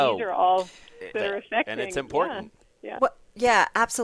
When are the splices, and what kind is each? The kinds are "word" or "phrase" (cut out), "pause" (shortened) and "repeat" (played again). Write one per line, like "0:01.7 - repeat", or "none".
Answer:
0:01.1 - phrase
0:02.6 - pause